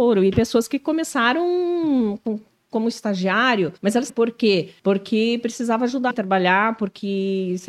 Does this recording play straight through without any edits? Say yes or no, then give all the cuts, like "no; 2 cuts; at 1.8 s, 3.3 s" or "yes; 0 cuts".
no; 4 cuts; at 3.8 s, 4.1 s, 4.8 s, 6.1 s